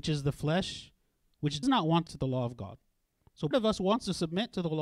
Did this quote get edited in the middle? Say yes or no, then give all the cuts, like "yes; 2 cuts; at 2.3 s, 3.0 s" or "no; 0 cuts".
yes; 3 cuts; at 1.6 s, 2.1 s, 3.5 s